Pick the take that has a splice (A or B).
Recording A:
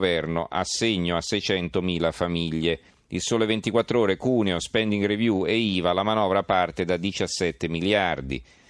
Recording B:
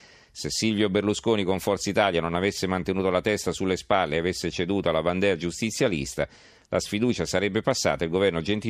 A